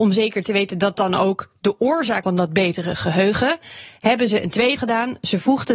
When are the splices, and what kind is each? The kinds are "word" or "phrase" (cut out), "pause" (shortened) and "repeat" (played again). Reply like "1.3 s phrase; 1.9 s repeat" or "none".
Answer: 0.9 s word; 2.2 s word; 4.8 s word